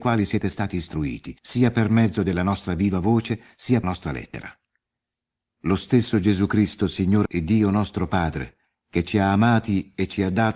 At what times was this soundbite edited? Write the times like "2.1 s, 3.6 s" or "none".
1.4 s, 3.8 s, 7.3 s